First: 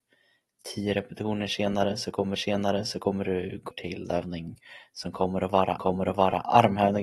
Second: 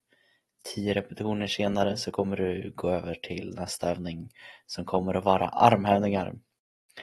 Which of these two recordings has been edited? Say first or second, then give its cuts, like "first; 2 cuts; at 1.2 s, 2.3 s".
first; 4 cuts; at 2.4 s, 3.7 s, 4.1 s, 5.8 s